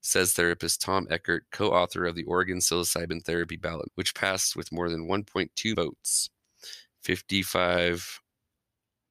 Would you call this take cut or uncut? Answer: cut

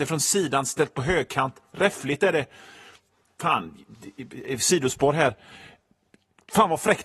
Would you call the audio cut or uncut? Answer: uncut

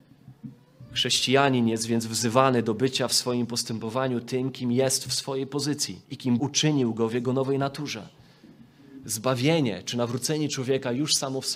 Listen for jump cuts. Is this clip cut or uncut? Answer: cut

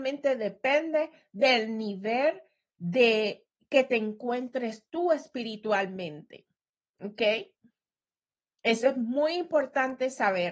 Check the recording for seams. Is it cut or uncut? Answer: uncut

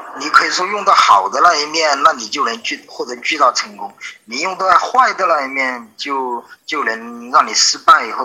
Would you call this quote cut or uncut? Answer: cut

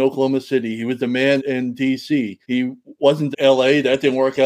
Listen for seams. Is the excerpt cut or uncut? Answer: cut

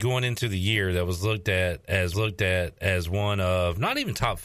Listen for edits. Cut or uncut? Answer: cut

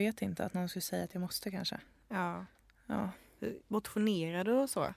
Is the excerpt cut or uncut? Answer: uncut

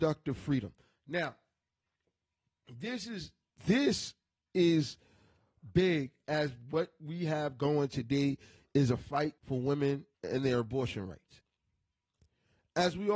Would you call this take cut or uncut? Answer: cut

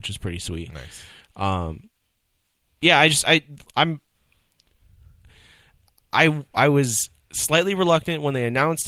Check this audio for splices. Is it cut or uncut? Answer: uncut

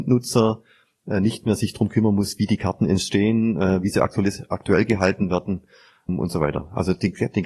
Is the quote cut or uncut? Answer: uncut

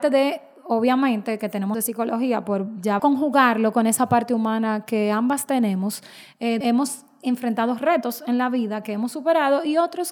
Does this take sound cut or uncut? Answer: cut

